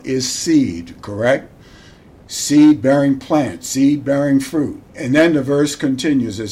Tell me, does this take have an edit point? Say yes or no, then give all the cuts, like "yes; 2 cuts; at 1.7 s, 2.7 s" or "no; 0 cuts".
yes; 1 cut; at 4.9 s